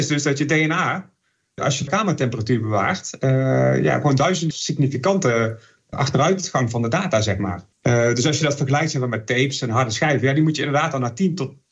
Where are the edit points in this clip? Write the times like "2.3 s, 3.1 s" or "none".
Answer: 1.9 s, 4.5 s, 7.7 s